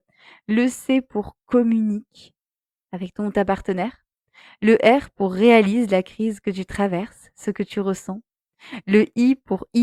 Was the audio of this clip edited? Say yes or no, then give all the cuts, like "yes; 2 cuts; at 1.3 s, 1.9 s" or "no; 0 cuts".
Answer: no; 0 cuts